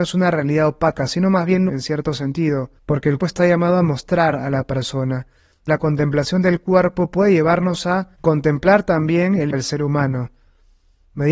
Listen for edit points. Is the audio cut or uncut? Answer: cut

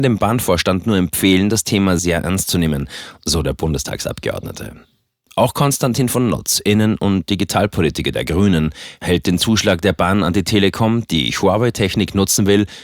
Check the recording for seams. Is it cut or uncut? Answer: cut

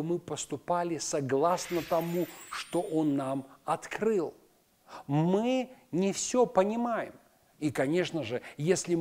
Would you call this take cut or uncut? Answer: uncut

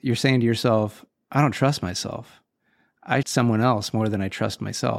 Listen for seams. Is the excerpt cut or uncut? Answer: cut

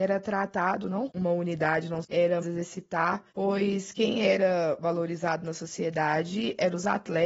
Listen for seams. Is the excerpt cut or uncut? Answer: cut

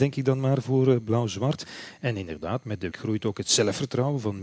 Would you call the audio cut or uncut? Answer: cut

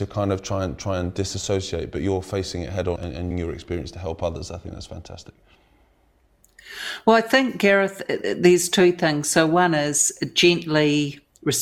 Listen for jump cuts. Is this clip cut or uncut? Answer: cut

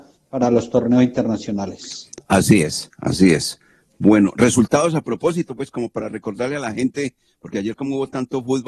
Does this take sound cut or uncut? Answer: uncut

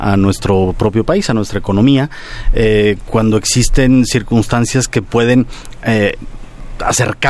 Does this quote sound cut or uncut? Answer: uncut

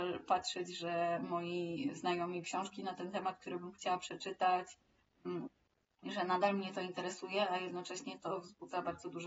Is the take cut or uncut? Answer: cut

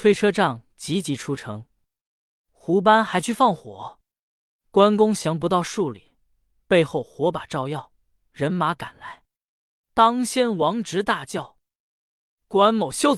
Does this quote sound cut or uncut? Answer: uncut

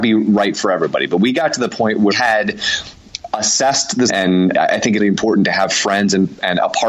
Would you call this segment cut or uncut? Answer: cut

